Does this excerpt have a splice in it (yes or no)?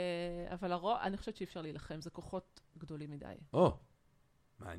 no